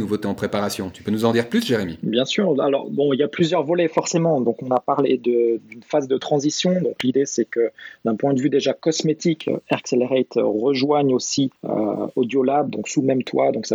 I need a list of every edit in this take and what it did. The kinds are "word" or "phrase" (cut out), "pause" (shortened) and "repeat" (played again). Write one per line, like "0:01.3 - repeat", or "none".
0:11.6 - pause